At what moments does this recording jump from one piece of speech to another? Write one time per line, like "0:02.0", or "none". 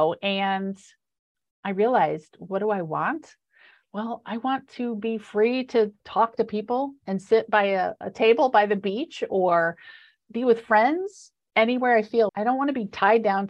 0:06.0
0:08.0
0:12.3